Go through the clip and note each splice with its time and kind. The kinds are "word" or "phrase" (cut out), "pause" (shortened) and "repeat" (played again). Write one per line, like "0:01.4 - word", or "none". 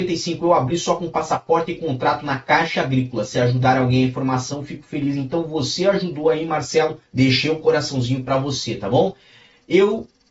0:07.1 - pause